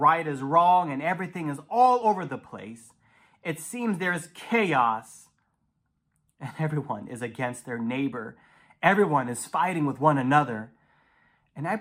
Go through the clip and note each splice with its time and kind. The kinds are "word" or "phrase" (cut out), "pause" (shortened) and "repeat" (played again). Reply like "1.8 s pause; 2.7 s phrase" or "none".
none